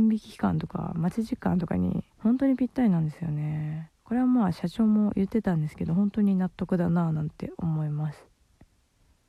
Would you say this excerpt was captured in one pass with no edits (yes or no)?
no